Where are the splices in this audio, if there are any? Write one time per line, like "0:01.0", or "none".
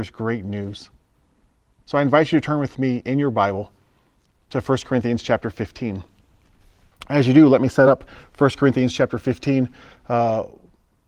none

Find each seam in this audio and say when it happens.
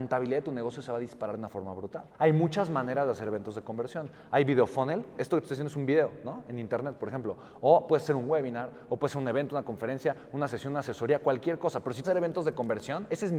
0:02.1
0:12.0

